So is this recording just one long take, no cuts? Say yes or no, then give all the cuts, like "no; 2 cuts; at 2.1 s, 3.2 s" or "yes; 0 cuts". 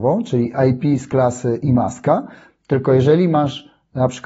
yes; 0 cuts